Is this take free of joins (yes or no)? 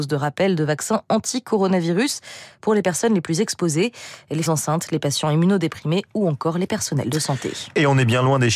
no